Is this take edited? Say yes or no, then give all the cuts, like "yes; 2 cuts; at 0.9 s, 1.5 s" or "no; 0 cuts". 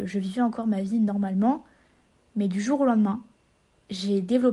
no; 0 cuts